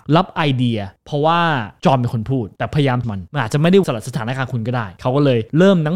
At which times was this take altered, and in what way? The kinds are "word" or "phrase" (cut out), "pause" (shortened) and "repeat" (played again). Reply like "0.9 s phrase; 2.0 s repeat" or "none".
3.0 s word; 3.8 s word